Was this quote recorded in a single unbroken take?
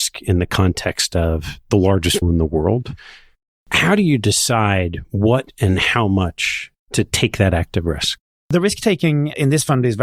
no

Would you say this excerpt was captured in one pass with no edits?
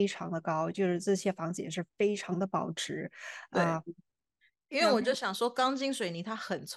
yes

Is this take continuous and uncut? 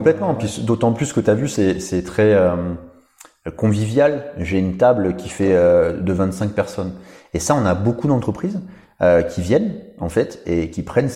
yes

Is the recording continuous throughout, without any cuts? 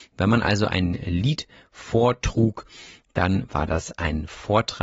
yes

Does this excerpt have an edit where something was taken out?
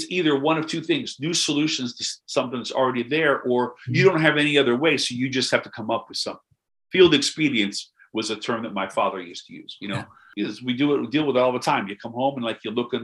no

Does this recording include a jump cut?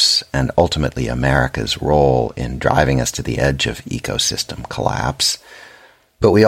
no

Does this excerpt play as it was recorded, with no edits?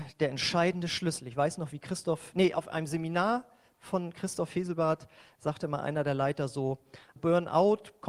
no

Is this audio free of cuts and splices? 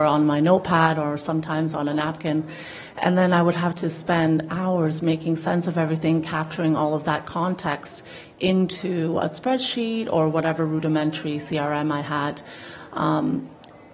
yes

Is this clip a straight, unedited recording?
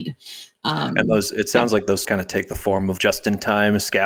no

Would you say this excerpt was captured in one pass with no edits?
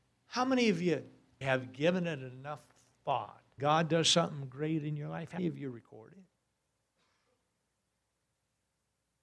no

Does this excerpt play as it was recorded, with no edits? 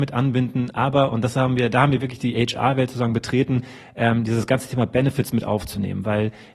yes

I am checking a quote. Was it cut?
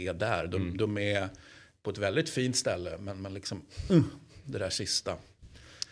no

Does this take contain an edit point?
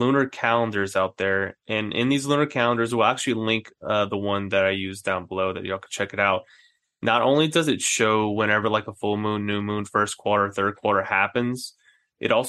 no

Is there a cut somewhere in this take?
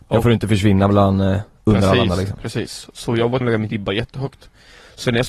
yes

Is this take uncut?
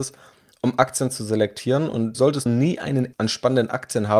no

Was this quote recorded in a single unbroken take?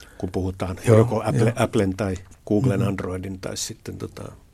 no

